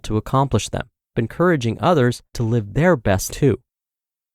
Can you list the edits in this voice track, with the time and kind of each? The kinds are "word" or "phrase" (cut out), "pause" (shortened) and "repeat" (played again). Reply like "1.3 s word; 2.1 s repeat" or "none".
1.1 s phrase; 2.3 s pause; 3.3 s word